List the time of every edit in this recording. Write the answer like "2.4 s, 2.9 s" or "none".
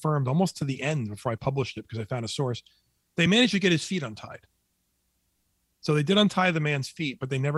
none